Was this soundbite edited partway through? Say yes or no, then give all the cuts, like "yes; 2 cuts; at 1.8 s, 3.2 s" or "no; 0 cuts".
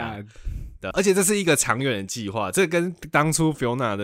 yes; 1 cut; at 0.9 s